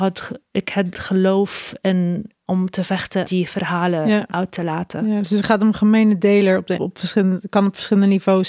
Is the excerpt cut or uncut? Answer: cut